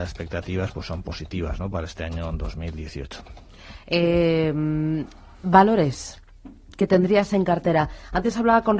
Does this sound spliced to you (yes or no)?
no